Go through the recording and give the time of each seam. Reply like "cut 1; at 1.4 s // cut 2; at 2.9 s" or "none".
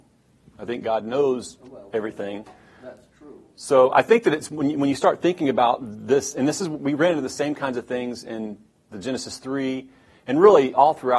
none